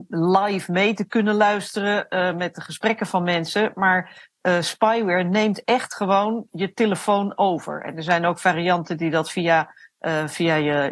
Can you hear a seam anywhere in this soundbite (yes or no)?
no